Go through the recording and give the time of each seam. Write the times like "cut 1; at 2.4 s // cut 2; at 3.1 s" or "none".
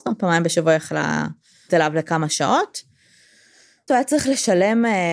cut 1; at 1.7 s // cut 2; at 3.9 s

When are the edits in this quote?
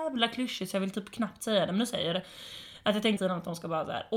cut 1; at 3.2 s

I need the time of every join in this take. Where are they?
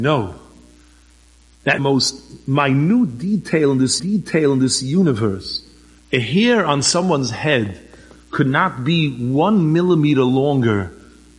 cut 1; at 1.8 s // cut 2; at 4.0 s

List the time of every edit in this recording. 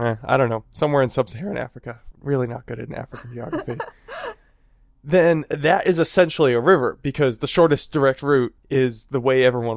none

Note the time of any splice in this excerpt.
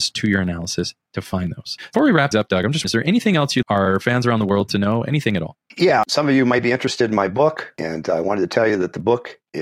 cut 1; at 1.9 s // cut 2; at 2.3 s // cut 3; at 2.8 s // cut 4; at 3.6 s

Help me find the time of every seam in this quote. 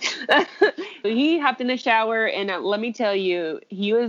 cut 1; at 1.0 s

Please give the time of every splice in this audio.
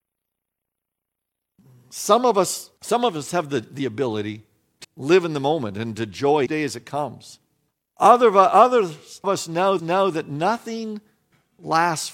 cut 1; at 2.8 s // cut 2; at 4.8 s // cut 3; at 6.5 s // cut 4; at 7.7 s // cut 5; at 9.2 s // cut 6; at 9.8 s

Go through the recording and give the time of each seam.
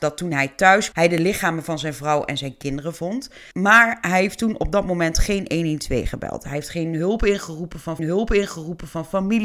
cut 1; at 0.9 s // cut 2; at 3.5 s // cut 3; at 8.0 s

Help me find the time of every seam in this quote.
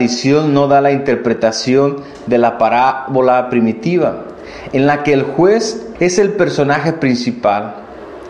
cut 1; at 6.0 s

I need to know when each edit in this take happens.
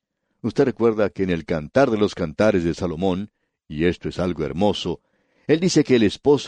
none

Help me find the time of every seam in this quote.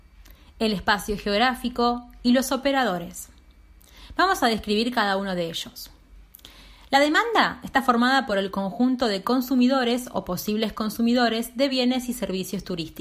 none

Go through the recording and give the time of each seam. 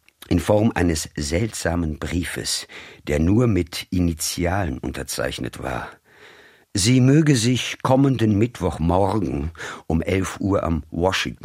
none

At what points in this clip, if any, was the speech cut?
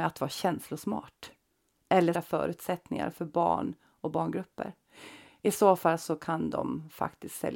cut 1; at 2.1 s

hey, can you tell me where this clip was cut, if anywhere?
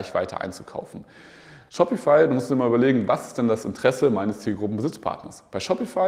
none

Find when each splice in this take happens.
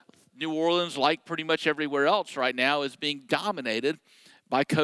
none

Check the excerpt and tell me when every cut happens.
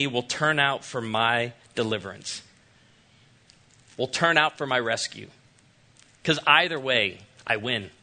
none

